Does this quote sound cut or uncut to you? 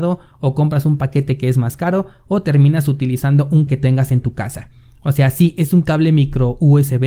cut